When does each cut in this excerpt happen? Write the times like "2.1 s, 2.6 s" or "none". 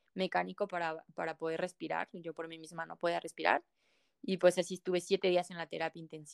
none